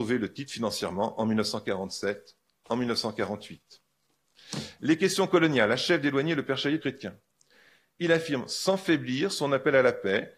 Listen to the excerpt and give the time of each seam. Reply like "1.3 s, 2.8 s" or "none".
6.8 s